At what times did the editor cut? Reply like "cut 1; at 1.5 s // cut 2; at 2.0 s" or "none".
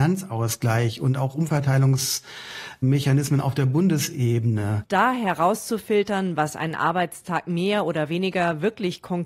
none